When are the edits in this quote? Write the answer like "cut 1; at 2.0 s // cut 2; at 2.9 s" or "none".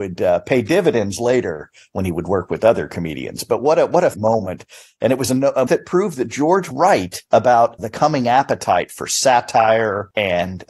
cut 1; at 4.1 s // cut 2; at 5.7 s // cut 3; at 6.7 s // cut 4; at 7.8 s